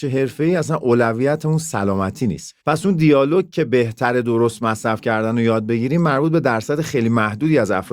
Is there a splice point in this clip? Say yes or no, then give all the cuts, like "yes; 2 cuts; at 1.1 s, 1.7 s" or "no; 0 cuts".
yes; 1 cut; at 2.6 s